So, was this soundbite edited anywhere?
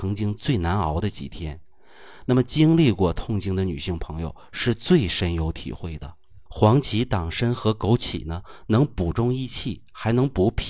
yes; 1 cut; at 6.5 s

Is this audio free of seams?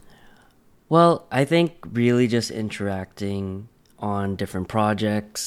yes; 0 cuts

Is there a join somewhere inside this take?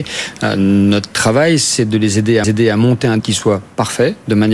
yes; 2 cuts; at 2.4 s, 3.2 s

